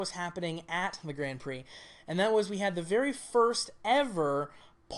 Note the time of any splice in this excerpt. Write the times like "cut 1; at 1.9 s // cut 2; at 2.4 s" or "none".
none